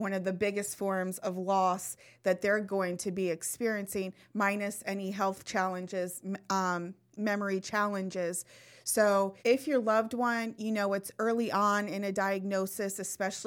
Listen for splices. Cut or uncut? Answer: cut